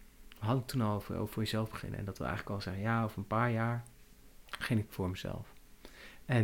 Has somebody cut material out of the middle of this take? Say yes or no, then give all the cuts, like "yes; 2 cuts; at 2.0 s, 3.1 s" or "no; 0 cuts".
no; 0 cuts